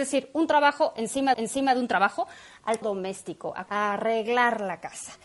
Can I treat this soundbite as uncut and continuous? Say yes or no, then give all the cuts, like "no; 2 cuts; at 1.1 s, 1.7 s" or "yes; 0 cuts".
no; 3 cuts; at 1.3 s, 2.8 s, 3.7 s